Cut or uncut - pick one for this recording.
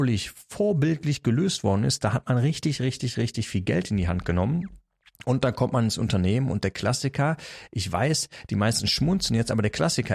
uncut